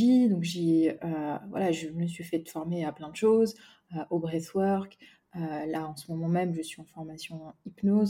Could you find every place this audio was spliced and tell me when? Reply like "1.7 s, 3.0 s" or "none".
none